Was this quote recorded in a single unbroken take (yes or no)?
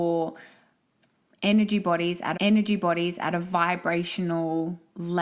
no